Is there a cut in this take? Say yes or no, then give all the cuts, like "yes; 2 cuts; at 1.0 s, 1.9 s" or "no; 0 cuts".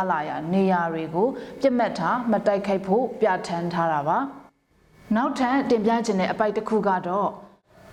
yes; 1 cut; at 4.5 s